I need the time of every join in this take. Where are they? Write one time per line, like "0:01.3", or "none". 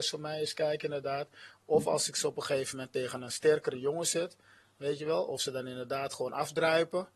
none